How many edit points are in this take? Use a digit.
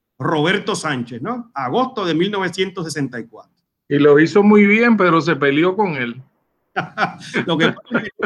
0